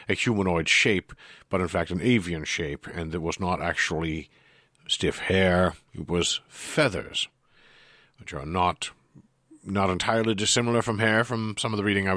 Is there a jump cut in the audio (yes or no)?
no